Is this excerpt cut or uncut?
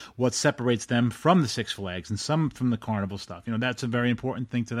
uncut